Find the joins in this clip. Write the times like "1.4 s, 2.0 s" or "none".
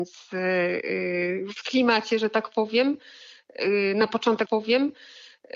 4.5 s